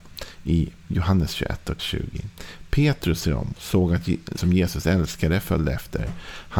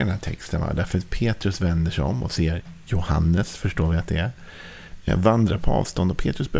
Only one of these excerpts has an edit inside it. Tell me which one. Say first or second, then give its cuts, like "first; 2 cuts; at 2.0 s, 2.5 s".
first; 4 cuts; at 1.8 s, 3.2 s, 3.5 s, 4.4 s